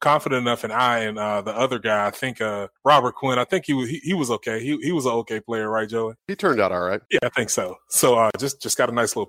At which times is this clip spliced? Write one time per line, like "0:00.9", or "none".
0:02.8
0:06.2
0:07.1